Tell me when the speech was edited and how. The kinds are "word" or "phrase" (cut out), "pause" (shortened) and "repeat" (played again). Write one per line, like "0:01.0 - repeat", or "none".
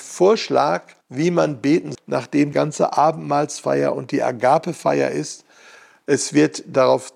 0:01.0 - pause
0:01.9 - word
0:02.5 - word

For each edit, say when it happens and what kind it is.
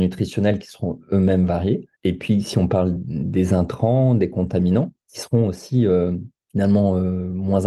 0:02.0 - pause
0:03.0 - word
0:05.0 - pause
0:06.4 - pause

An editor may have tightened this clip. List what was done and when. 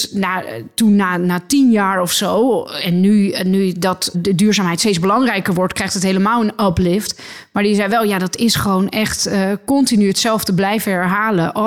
0:04.1 - word

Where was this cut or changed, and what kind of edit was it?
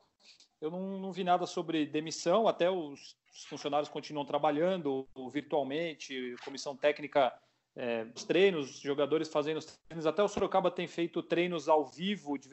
0:08.2 - word

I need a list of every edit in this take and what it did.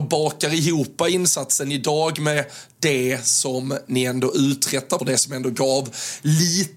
0:05.0 - phrase

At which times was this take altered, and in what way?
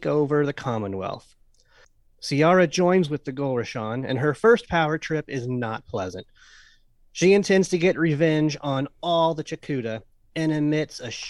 none

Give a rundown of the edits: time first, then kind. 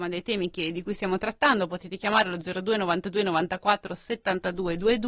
none

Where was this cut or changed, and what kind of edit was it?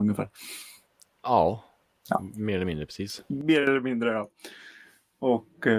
none

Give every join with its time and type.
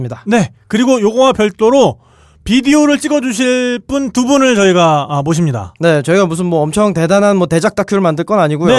none

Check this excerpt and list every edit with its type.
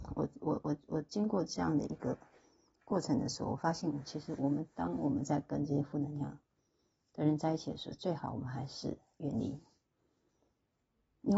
none

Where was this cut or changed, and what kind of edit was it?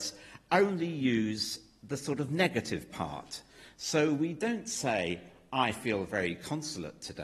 none

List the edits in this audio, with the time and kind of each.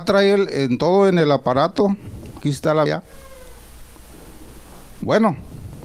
0:02.4 - word
0:02.9 - word

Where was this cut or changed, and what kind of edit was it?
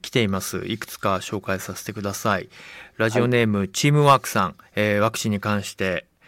0:04.7 - pause

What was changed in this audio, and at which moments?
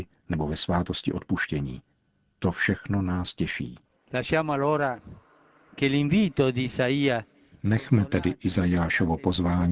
none

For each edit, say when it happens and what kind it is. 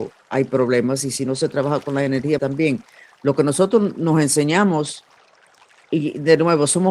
0:02.4 - word

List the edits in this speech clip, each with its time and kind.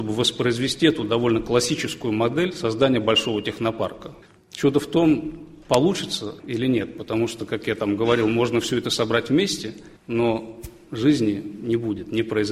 0:04.2 - pause
0:06.4 - word
0:10.0 - pause

